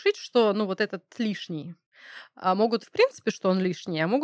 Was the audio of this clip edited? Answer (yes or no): yes